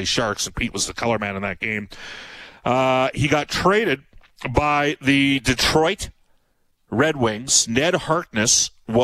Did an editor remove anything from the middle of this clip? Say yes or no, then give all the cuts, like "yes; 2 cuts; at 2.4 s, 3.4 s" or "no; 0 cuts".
no; 0 cuts